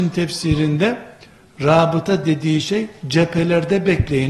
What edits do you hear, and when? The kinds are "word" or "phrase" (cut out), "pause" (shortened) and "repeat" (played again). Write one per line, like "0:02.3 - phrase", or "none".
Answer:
none